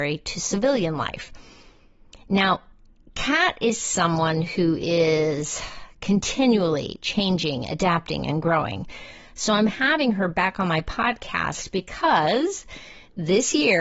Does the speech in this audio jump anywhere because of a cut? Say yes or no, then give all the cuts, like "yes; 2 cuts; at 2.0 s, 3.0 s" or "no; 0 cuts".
no; 0 cuts